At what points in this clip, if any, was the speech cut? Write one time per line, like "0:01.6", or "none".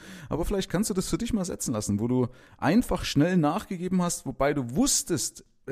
none